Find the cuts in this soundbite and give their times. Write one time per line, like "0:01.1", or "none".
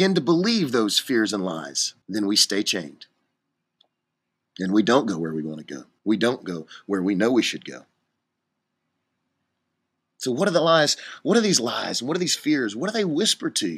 0:02.0
0:06.0